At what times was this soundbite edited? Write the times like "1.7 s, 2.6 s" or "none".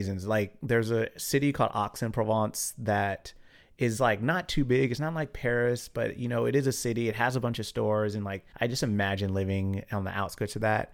8.5 s